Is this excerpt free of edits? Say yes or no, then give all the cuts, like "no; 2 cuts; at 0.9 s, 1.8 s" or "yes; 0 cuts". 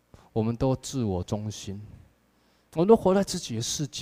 yes; 0 cuts